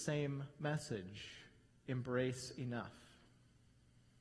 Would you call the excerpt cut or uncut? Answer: uncut